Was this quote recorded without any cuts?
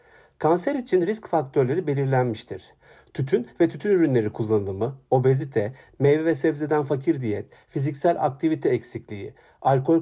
yes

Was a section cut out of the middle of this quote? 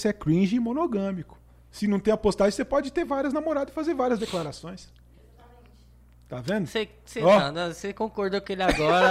no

